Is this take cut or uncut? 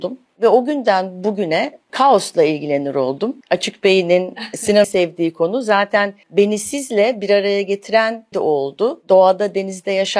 cut